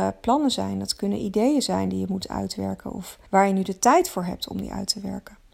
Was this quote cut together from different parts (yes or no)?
yes